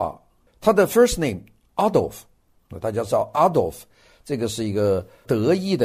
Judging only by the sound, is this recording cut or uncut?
uncut